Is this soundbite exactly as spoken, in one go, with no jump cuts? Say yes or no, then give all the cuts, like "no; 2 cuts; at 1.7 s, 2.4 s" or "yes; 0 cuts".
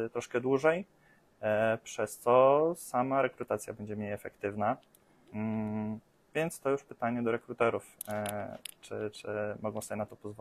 yes; 0 cuts